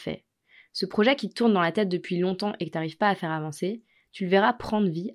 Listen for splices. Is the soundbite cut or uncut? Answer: uncut